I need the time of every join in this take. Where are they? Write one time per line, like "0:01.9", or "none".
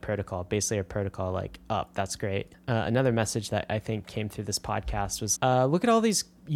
0:02.5
0:05.4